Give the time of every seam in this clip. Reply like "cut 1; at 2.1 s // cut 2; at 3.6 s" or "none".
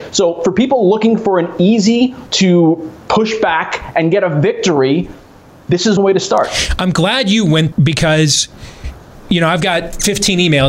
cut 1; at 2.3 s // cut 2; at 6.0 s // cut 3; at 7.7 s

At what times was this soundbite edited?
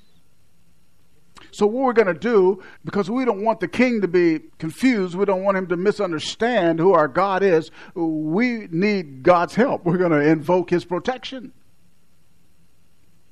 cut 1; at 2.8 s // cut 2; at 4.5 s

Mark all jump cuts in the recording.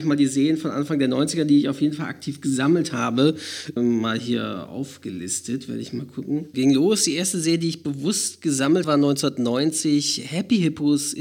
cut 1; at 3.8 s // cut 2; at 6.5 s // cut 3; at 8.8 s

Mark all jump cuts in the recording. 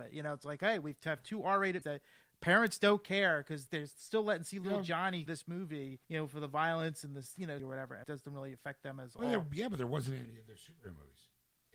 cut 1; at 1.8 s // cut 2; at 3.7 s // cut 3; at 5.3 s // cut 4; at 6.0 s // cut 5; at 7.6 s // cut 6; at 8.0 s // cut 7; at 10.2 s

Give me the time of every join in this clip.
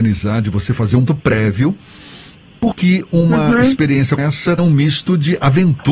cut 1; at 1.1 s // cut 2; at 2.7 s // cut 3; at 4.2 s // cut 4; at 4.6 s

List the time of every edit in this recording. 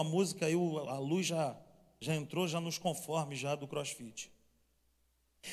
none

